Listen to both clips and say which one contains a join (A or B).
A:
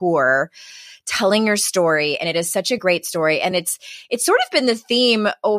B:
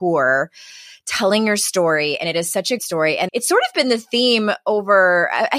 B